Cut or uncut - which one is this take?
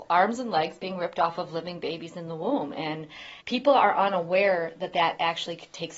cut